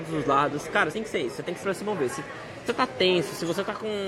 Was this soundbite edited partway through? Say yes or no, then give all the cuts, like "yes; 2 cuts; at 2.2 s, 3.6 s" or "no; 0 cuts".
yes; 3 cuts; at 0.9 s, 1.6 s, 2.7 s